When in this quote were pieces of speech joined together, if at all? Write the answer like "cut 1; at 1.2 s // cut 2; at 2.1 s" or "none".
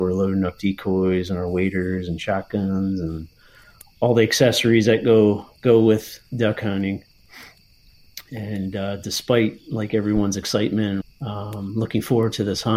cut 1; at 11.0 s